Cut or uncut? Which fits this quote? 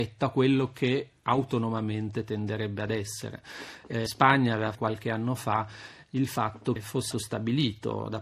cut